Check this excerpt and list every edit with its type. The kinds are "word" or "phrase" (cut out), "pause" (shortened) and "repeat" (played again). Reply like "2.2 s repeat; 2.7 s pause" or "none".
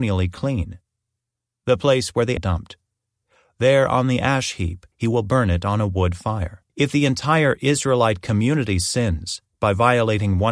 2.4 s phrase; 4.9 s pause; 6.7 s pause